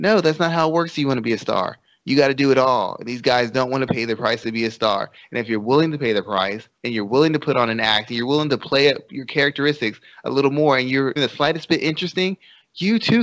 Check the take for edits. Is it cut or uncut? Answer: cut